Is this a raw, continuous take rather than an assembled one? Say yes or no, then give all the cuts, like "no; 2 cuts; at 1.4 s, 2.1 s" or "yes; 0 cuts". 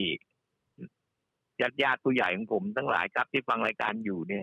yes; 0 cuts